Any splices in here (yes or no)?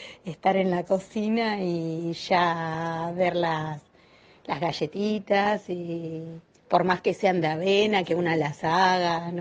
no